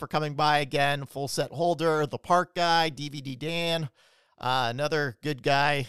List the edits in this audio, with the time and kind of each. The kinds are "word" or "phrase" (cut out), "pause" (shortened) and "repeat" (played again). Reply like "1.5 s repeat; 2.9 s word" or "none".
none